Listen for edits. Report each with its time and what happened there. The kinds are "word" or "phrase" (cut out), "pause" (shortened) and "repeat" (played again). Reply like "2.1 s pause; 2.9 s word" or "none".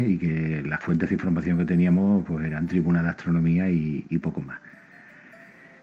none